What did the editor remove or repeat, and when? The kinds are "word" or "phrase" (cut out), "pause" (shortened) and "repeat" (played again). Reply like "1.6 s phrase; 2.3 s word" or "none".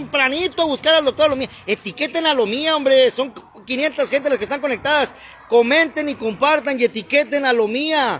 none